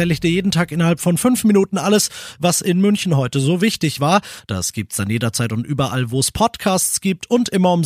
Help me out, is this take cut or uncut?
uncut